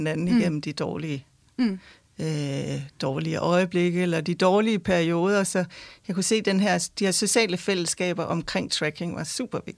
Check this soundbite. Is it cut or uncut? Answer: uncut